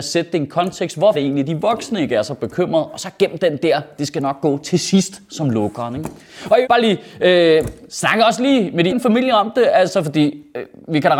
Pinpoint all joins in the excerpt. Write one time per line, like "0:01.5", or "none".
0:01.1
0:06.6
0:08.9

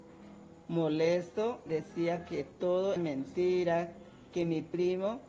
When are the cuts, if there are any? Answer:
0:01.7
0:03.0

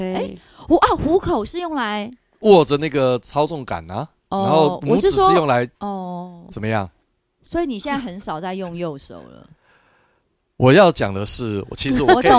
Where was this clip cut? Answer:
0:05.7

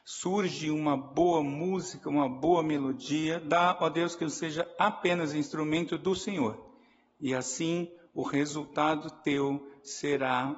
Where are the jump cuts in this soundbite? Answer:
none

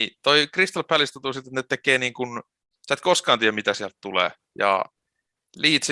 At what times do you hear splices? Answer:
none

